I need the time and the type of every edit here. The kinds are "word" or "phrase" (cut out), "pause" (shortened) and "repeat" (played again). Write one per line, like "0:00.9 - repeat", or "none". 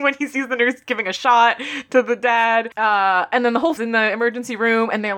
0:03.8 - phrase